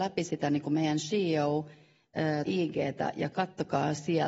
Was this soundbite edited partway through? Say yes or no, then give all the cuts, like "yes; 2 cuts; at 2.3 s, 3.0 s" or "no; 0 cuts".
yes; 1 cut; at 2.4 s